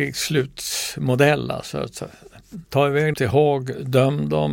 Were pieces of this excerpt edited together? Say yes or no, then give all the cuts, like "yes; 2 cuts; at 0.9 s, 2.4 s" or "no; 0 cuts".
yes; 2 cuts; at 2.6 s, 3.1 s